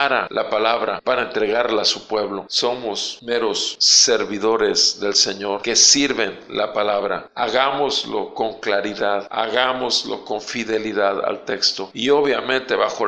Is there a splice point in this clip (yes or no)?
no